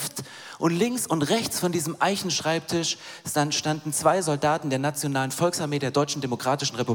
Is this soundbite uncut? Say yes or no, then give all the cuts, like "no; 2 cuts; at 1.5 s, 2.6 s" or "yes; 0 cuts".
yes; 0 cuts